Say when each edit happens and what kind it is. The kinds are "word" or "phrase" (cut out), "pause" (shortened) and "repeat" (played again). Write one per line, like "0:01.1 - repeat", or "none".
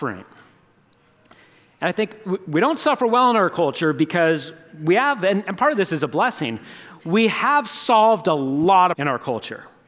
0:08.9 - phrase